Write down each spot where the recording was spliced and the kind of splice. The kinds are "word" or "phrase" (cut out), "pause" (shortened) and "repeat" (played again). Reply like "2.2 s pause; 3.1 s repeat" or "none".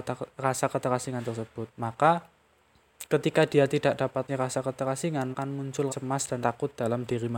1.7 s pause; 4.3 s word; 5.3 s word; 5.9 s word; 6.4 s word